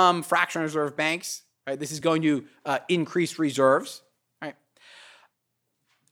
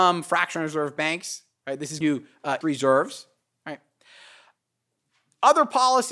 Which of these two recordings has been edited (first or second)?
second